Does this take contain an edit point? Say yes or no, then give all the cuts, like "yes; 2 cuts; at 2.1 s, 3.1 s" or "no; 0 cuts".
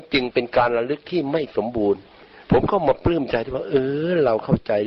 no; 0 cuts